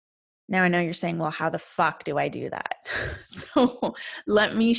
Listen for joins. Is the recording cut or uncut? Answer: uncut